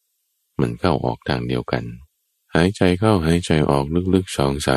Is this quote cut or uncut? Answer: cut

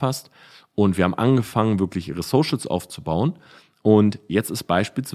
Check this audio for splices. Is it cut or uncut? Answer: uncut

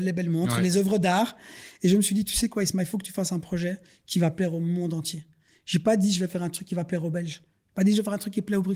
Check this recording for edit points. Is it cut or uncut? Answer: uncut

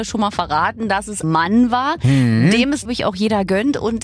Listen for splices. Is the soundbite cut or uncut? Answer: cut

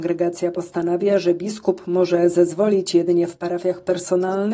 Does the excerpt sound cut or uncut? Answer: uncut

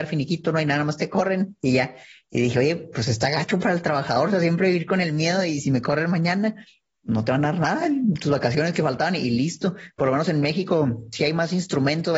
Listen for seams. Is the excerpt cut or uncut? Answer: uncut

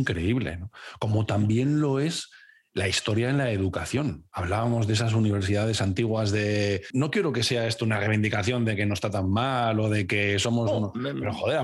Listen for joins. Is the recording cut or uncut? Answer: uncut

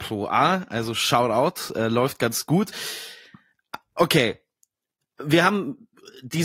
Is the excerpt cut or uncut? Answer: uncut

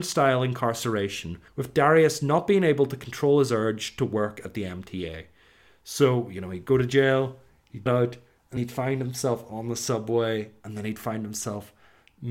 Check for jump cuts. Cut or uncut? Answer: cut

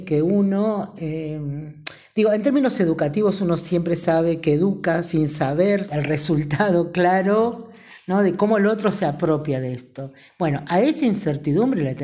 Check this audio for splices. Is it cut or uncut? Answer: cut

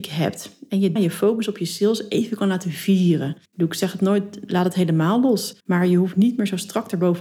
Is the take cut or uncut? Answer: cut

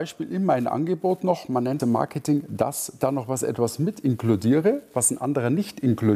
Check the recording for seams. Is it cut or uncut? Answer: cut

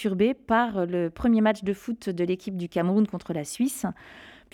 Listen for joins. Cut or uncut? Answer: uncut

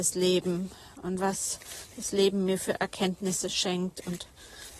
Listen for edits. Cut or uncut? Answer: uncut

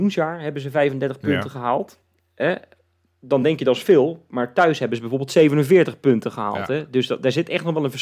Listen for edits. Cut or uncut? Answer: uncut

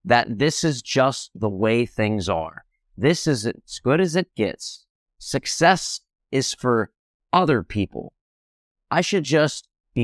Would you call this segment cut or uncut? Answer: uncut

